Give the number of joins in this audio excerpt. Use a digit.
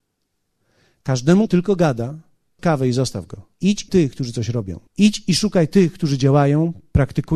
5